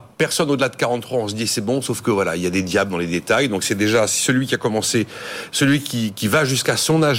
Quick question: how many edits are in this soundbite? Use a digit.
0